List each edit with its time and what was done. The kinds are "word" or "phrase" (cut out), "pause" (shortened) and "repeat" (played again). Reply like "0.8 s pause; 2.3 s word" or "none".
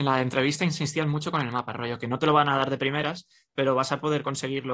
none